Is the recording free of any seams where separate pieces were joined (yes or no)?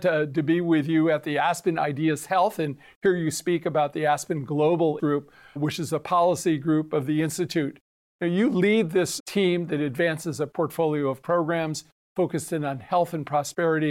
no